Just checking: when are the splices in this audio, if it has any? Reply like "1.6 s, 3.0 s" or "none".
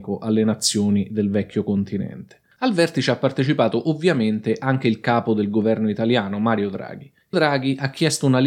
7.3 s